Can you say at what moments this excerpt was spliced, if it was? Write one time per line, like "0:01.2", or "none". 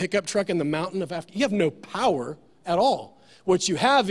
none